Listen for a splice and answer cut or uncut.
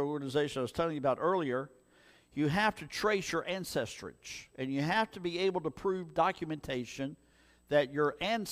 uncut